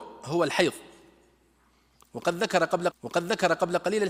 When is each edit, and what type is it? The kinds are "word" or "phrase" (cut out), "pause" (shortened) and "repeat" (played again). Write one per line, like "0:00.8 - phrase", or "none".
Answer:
0:02.9 - repeat

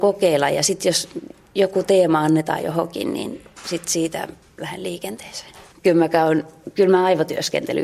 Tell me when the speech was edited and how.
none

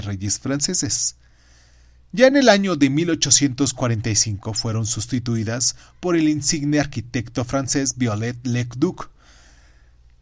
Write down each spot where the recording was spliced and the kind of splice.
none

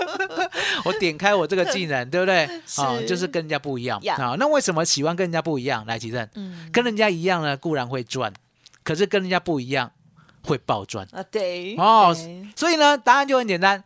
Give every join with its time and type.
none

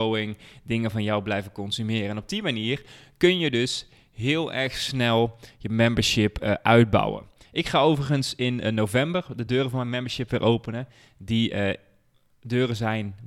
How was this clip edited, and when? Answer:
none

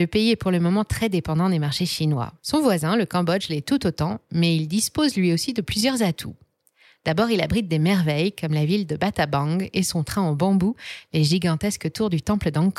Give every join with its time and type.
0:02.4 - pause

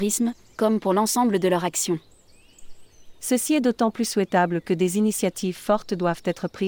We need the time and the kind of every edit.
none

